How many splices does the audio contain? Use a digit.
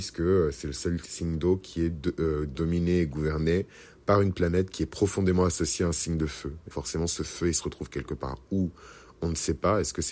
1